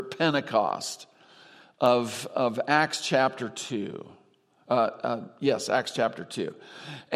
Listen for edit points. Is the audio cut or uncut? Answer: uncut